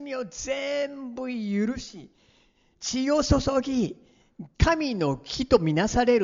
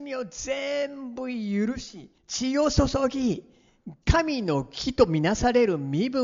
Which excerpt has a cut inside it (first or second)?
second